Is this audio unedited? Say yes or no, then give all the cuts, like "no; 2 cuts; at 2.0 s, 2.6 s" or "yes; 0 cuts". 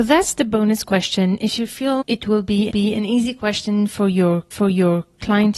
no; 3 cuts; at 2.0 s, 2.7 s, 4.5 s